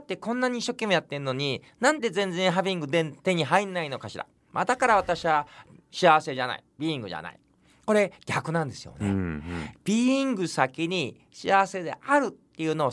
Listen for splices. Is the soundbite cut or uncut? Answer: uncut